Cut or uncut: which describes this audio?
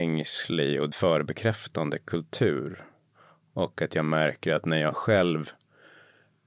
cut